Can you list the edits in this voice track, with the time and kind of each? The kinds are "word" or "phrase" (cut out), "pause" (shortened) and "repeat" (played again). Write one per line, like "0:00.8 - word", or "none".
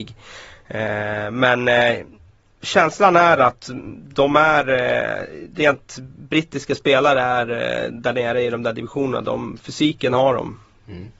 none